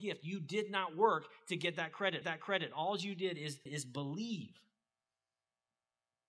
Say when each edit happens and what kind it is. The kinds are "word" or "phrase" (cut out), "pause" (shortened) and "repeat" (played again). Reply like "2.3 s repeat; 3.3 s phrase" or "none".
2.2 s repeat; 3.7 s phrase